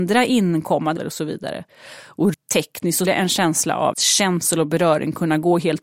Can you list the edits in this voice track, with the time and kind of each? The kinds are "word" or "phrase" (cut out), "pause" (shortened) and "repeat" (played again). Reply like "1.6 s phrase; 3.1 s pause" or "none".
1.0 s word; 2.3 s word; 3.0 s word; 3.9 s word